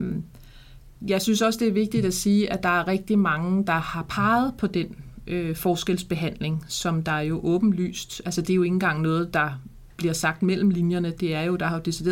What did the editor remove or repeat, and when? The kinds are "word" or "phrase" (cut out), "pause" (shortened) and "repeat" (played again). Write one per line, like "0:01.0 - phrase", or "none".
none